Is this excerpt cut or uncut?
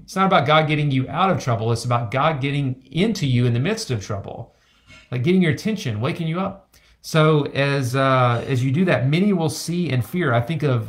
uncut